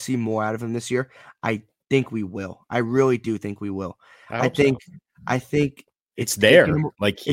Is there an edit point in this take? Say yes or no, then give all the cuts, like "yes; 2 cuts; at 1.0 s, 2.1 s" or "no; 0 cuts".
no; 0 cuts